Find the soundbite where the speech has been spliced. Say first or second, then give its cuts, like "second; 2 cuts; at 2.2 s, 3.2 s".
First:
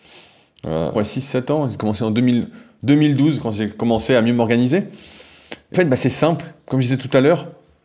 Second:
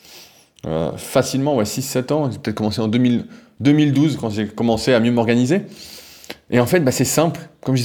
first; 3 cuts; at 0.9 s, 1.8 s, 5.7 s